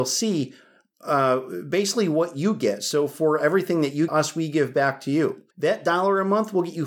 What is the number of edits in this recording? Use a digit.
2